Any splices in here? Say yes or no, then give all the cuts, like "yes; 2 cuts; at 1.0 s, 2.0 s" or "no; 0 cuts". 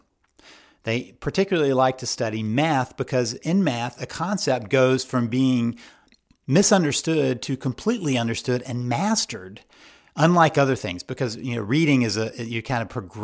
no; 0 cuts